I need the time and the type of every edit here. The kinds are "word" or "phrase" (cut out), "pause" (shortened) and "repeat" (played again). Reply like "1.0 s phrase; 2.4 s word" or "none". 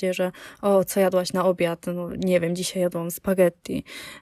none